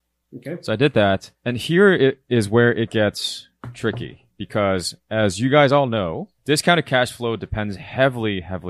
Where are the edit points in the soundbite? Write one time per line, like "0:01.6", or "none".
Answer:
0:01.4
0:06.4